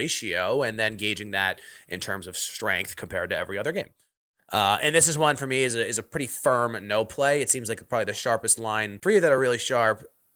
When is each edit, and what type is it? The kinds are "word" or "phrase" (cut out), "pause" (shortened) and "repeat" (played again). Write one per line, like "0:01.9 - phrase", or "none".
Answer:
none